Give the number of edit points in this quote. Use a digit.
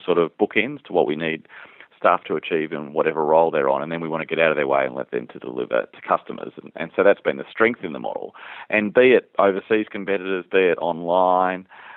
0